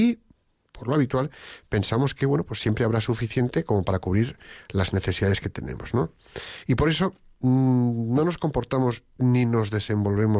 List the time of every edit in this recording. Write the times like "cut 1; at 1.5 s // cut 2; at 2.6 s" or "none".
none